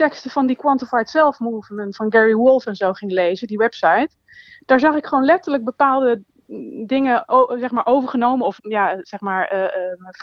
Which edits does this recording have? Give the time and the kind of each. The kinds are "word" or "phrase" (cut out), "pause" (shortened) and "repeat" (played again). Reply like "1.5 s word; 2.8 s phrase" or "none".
1.9 s word; 8.6 s phrase